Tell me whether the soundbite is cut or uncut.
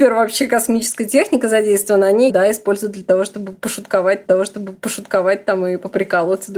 cut